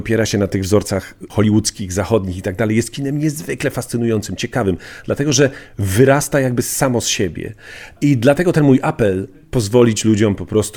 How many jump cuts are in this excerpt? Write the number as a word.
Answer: one